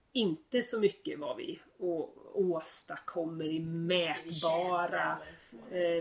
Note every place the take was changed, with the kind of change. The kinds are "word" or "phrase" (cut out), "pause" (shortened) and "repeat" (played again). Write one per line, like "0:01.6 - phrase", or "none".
none